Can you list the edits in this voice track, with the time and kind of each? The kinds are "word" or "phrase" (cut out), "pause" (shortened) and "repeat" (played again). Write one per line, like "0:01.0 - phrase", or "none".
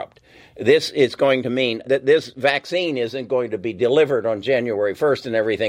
0:01.8 - word